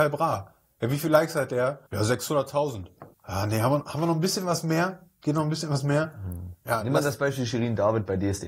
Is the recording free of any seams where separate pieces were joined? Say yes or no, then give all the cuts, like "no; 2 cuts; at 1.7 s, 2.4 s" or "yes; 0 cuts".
no; 2 cuts; at 1.9 s, 3.1 s